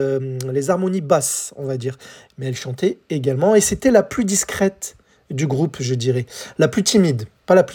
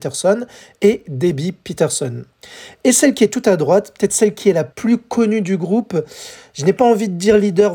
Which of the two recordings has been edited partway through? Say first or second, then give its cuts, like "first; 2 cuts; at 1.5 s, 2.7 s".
second; 1 cut; at 4.7 s